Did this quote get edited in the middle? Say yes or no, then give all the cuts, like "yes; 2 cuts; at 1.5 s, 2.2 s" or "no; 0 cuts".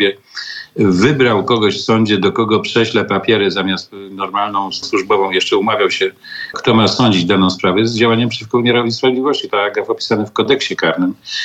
yes; 3 cuts; at 4.8 s, 6.5 s, 9.5 s